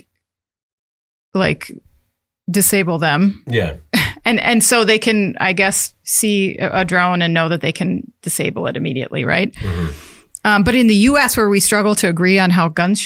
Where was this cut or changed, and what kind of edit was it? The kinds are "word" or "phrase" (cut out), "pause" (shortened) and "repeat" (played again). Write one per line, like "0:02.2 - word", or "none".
0:04.4 - word